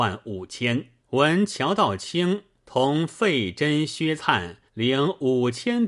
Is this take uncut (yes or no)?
no